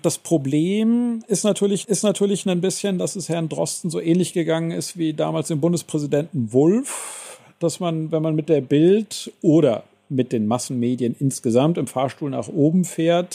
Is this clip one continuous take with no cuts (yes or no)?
no